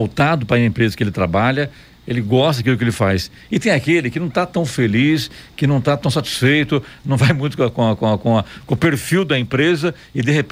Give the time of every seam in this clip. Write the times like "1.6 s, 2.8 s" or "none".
none